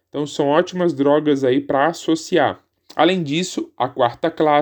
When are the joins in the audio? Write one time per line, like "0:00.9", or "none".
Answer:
0:02.7